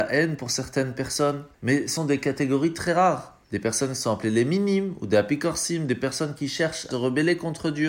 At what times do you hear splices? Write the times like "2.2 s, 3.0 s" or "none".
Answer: 1.5 s, 2.0 s, 3.4 s, 6.9 s